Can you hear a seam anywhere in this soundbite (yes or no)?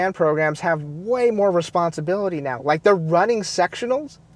no